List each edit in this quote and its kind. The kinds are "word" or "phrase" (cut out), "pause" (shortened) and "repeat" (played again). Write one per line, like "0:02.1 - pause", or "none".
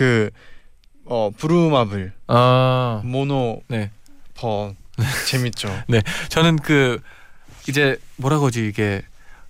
none